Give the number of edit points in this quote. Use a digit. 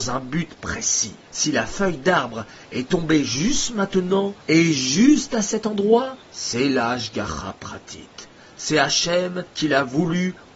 4